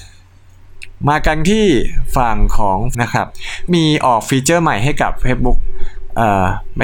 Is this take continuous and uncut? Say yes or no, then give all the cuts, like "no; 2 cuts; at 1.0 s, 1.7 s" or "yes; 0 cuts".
no; 2 cuts; at 2.9 s, 3.7 s